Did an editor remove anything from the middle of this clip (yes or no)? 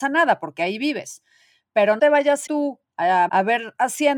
yes